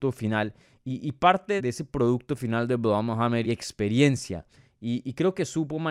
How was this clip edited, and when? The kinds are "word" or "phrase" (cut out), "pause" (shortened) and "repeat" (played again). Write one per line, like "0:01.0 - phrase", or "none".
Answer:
0:01.6 - word
0:03.4 - phrase